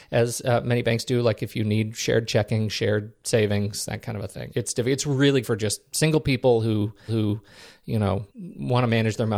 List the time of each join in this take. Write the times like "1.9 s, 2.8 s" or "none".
4.5 s, 5.4 s, 7.1 s, 8.3 s